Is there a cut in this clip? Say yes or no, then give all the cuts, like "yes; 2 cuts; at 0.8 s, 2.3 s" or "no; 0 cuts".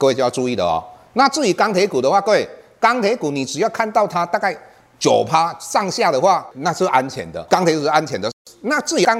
no; 0 cuts